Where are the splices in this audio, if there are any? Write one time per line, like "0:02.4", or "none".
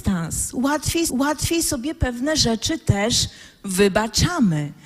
0:01.1